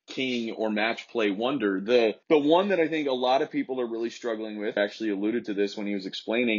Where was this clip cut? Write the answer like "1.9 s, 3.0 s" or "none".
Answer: 2.2 s, 4.8 s